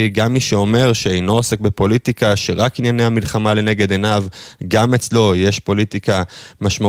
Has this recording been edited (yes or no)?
no